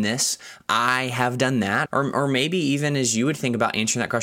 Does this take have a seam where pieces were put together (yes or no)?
yes